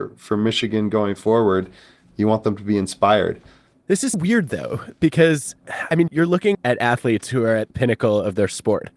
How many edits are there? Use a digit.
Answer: 4